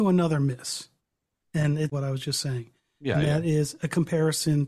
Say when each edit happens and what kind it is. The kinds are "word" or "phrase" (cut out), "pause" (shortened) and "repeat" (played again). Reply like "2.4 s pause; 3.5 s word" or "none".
1.9 s phrase